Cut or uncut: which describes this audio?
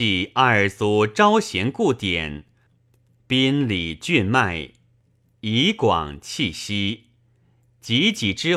uncut